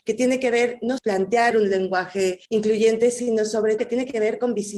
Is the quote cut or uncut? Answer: cut